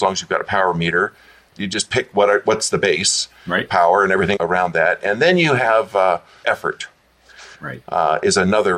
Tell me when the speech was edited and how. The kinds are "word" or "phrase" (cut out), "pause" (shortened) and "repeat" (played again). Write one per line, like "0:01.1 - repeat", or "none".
0:01.5 - word
0:04.4 - phrase
0:06.4 - word